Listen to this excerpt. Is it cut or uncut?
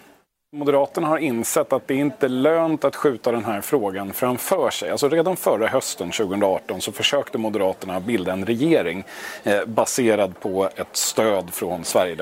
uncut